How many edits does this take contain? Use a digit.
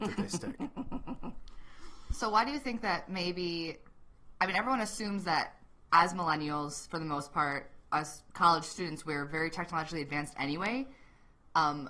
0